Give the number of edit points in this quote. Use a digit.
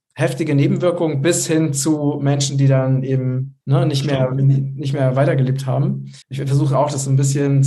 2